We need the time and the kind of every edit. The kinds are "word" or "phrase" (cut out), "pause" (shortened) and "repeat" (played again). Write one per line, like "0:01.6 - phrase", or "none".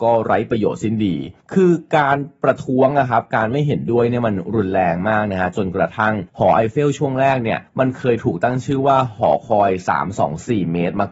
0:01.4 - pause
0:06.3 - pause
0:07.7 - pause